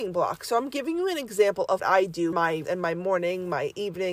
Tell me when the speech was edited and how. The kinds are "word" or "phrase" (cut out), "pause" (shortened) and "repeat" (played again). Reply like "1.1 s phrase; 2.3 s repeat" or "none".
1.8 s word; 2.3 s word; 2.6 s word